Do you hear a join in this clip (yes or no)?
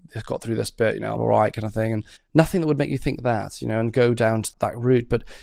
yes